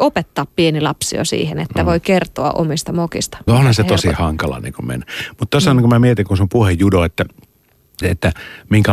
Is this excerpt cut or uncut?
cut